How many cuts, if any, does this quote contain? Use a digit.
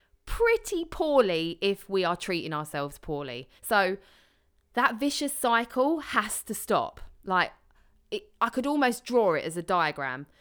1